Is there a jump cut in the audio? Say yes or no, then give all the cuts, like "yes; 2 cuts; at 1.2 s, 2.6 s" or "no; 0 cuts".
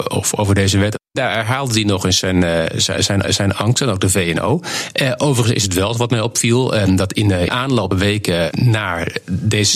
yes; 3 cuts; at 3.2 s, 7.5 s, 7.9 s